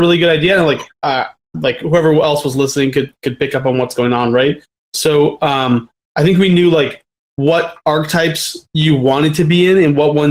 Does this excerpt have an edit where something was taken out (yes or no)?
no